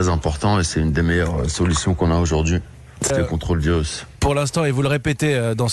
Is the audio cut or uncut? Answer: cut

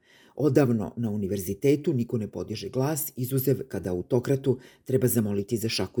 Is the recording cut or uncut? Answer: uncut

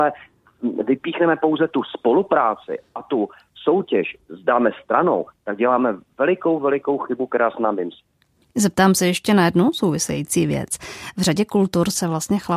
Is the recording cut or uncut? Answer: uncut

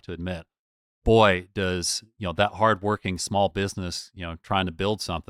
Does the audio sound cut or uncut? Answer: uncut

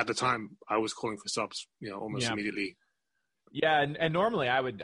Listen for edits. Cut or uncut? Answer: uncut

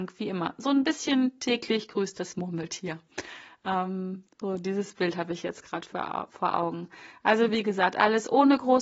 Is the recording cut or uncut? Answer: uncut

